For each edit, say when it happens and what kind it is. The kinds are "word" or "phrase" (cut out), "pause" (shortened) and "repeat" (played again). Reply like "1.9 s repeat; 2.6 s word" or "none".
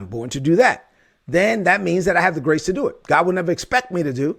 none